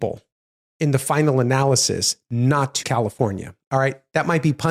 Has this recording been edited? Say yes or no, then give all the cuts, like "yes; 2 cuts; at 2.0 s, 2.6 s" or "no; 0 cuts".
yes; 1 cut; at 2.8 s